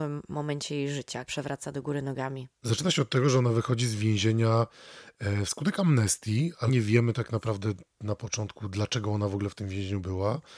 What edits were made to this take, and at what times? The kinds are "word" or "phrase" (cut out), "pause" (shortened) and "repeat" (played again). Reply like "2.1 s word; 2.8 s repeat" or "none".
1.3 s phrase; 2.5 s pause; 6.7 s word